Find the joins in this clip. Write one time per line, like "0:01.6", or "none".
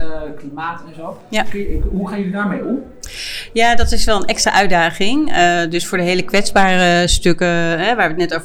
none